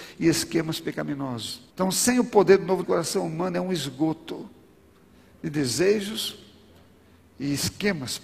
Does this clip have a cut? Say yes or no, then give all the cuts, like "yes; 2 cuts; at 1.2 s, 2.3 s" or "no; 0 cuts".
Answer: yes; 2 cuts; at 1.7 s, 2.8 s